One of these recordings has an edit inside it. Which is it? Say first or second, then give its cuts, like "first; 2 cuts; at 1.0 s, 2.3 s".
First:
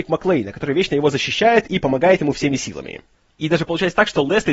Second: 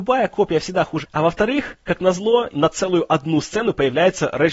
second; 2 cuts; at 1.0 s, 2.5 s